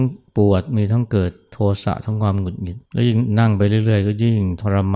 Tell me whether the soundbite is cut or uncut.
cut